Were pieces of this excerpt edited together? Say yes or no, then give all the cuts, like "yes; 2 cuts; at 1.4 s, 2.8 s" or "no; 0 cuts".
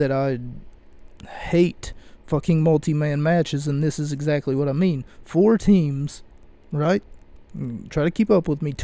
no; 0 cuts